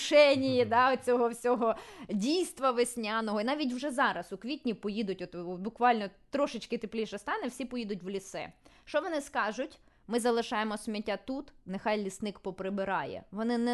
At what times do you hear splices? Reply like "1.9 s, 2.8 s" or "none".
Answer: none